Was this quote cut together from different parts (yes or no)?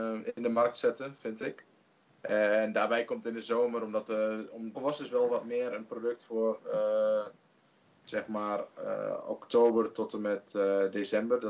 yes